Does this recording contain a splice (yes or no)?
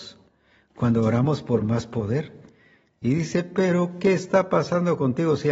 no